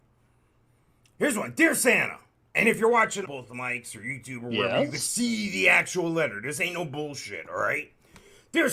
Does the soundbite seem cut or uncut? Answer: cut